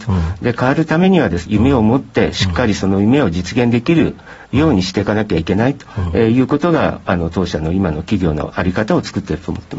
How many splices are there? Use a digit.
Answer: 1